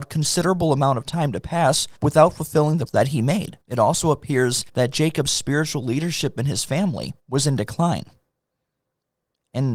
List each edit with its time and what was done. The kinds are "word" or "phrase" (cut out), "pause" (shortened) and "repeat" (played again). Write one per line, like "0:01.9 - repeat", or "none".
0:02.0 - pause
0:02.9 - word
0:03.6 - pause
0:04.7 - pause
0:07.2 - pause